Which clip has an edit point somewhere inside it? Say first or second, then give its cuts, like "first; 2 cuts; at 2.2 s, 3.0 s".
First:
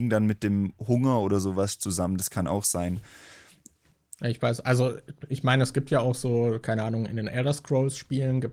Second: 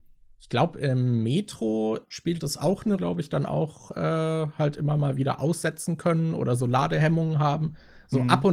second; 2 cuts; at 2.0 s, 3.0 s